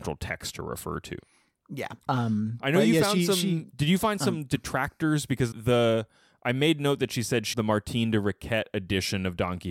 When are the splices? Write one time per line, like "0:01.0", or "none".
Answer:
0:02.1
0:05.5
0:07.5